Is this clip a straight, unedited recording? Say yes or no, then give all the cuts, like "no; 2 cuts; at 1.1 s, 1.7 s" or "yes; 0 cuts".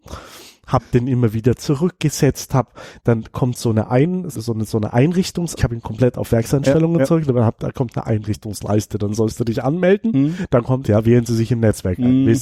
no; 3 cuts; at 4.3 s, 5.6 s, 10.8 s